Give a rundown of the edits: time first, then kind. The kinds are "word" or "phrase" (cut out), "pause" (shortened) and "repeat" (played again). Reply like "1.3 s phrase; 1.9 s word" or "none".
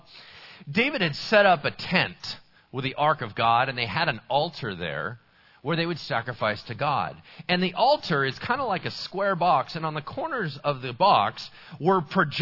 none